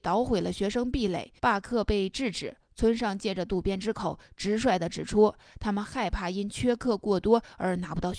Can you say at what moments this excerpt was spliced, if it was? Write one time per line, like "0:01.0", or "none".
0:01.4